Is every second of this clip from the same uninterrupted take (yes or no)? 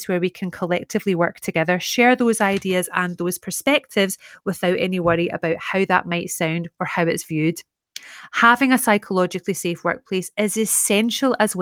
yes